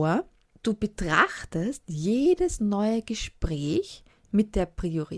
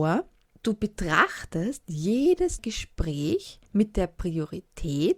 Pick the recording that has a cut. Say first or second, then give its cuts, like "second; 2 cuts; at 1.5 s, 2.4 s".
second; 2 cuts; at 2.6 s, 3.7 s